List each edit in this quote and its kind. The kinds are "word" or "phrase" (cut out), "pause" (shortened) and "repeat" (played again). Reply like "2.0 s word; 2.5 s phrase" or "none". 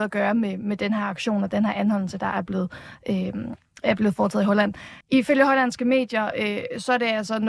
5.0 s pause